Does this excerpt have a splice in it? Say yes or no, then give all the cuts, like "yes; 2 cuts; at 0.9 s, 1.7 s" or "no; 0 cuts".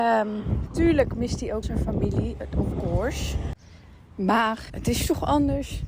yes; 2 cuts; at 1.6 s, 4.7 s